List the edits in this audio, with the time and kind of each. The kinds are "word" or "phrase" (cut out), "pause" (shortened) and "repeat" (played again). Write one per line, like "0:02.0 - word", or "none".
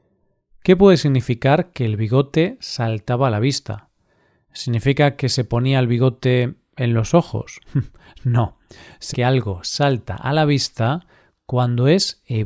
0:09.1 - word